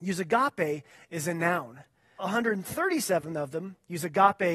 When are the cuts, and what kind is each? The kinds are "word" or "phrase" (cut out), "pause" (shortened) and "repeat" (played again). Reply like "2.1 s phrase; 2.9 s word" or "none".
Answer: 2.2 s word